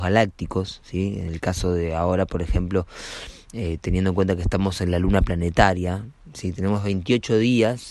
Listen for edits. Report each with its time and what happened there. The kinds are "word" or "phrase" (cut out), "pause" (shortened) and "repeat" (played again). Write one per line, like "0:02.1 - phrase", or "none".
none